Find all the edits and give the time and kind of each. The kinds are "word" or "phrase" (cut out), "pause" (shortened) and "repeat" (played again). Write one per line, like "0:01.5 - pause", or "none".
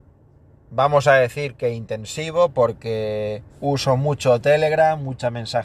0:03.5 - pause

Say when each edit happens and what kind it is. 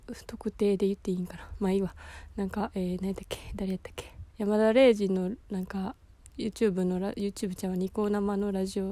0:04.3 - pause

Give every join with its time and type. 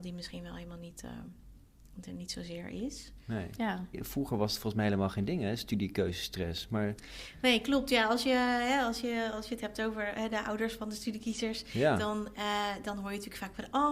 none

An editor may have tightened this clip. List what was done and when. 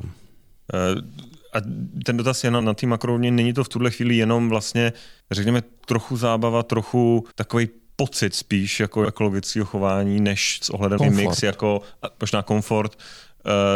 0:02.0 - word
0:02.6 - word
0:05.2 - pause
0:07.3 - pause
0:09.0 - word
0:11.0 - phrase

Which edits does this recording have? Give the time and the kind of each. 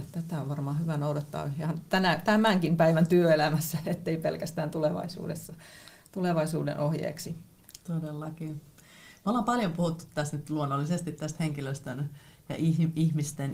none

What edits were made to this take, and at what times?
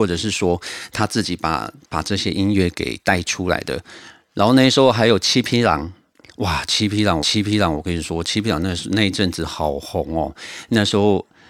0:07.2 - repeat

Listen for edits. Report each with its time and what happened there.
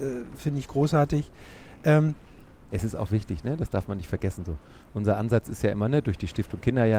none

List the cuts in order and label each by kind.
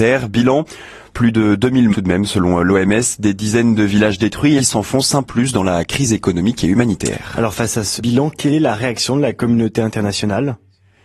0:01.9 - word
0:04.6 - phrase
0:05.2 - word
0:08.0 - word

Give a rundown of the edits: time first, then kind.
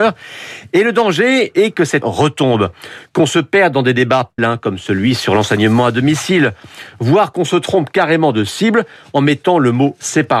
0:02.0 - word
0:04.4 - word

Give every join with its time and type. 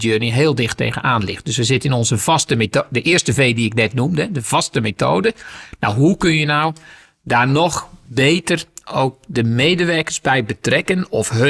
none

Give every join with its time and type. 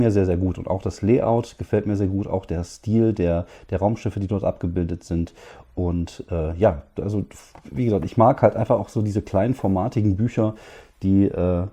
none

